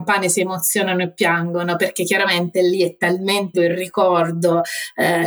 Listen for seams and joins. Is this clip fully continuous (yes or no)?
no